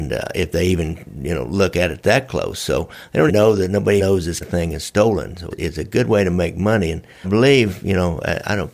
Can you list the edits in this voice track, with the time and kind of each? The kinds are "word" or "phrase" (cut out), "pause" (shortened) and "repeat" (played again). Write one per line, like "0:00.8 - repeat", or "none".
0:03.3 - word
0:04.0 - word
0:04.4 - word
0:05.5 - word
0:07.2 - word